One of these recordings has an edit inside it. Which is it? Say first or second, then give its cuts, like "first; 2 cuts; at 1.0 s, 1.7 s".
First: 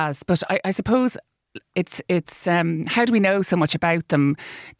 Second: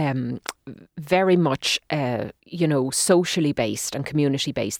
second; 1 cut; at 2.4 s